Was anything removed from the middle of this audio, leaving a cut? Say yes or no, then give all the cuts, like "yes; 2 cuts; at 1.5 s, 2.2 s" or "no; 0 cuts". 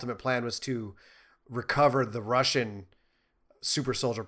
no; 0 cuts